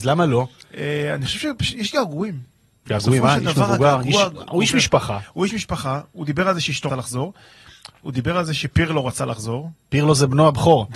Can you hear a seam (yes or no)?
yes